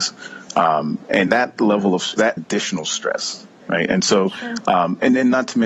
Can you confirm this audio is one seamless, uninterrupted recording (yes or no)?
no